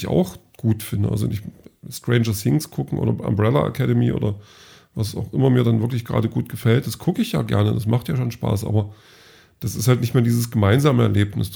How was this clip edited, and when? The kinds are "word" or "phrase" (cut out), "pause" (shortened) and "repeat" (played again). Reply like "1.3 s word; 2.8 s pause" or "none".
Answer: none

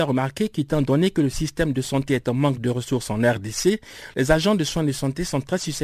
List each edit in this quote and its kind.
none

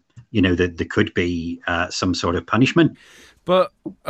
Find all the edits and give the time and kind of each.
none

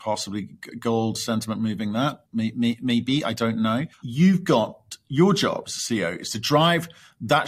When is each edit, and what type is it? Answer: 2.3 s pause; 3.9 s pause

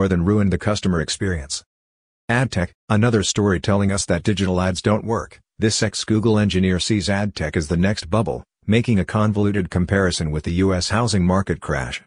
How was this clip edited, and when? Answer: 2.8 s pause; 8.0 s word

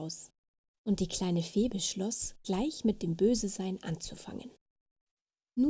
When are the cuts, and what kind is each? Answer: none

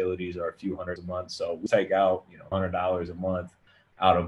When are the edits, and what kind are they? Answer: 1.0 s word; 1.7 s word; 2.5 s word

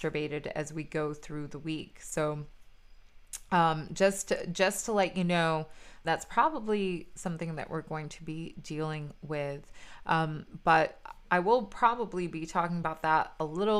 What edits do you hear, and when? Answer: 6.0 s word

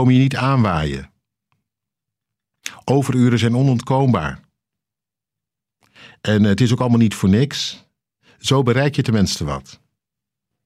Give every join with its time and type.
none

